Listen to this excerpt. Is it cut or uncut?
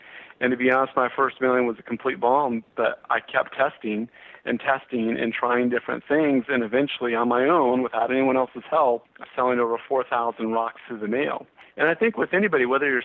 cut